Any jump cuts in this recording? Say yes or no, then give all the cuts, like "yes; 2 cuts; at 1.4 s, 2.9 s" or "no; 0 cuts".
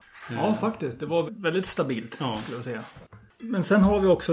yes; 1 cut; at 1.3 s